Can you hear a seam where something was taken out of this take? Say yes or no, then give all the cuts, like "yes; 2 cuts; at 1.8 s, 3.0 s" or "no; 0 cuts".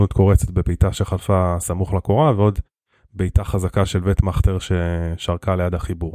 no; 0 cuts